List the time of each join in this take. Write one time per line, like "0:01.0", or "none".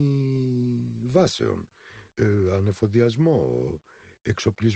none